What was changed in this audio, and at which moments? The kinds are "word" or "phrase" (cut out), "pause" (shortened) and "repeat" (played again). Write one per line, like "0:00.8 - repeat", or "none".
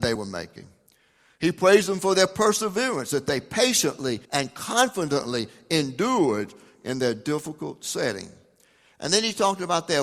0:04.2 - pause